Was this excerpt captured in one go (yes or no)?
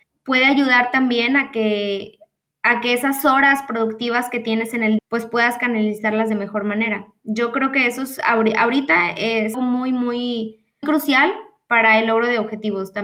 no